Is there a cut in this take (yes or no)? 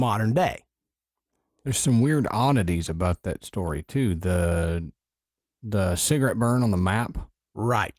no